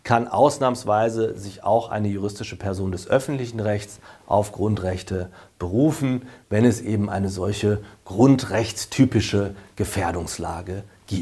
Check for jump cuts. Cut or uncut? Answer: uncut